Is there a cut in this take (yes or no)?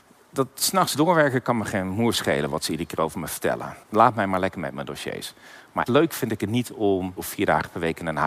yes